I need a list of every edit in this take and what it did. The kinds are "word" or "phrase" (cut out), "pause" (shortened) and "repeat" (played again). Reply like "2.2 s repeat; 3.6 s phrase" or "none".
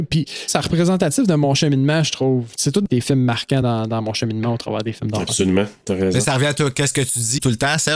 none